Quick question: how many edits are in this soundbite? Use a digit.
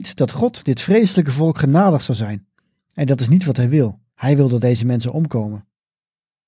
2